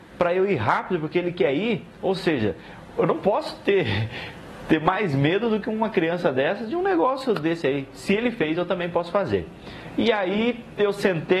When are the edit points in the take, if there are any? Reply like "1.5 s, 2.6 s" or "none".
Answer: none